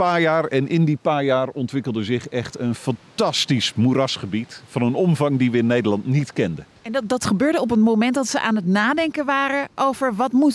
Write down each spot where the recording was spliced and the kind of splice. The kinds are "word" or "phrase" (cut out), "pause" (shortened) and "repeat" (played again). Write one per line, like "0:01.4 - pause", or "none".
0:06.8 - pause